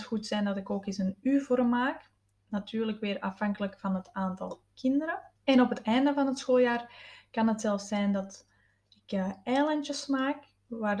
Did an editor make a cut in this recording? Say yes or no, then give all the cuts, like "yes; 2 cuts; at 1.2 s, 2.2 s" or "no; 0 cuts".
yes; 1 cut; at 5.4 s